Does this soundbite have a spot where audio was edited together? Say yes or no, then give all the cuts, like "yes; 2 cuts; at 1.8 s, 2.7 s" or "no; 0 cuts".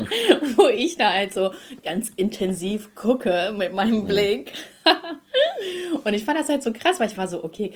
no; 0 cuts